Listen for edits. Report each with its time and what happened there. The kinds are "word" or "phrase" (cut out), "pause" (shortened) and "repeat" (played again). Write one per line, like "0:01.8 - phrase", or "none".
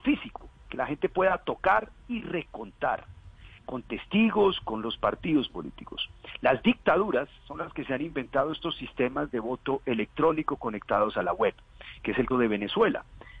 0:12.3 - word